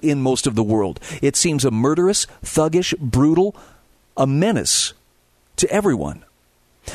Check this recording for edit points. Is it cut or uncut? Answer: uncut